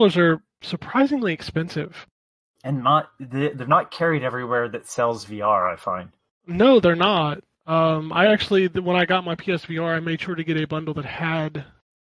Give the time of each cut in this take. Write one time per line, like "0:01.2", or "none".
none